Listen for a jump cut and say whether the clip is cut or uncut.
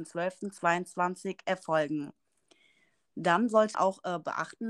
cut